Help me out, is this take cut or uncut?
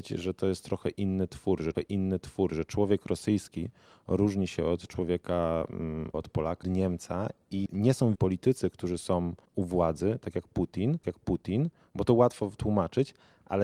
cut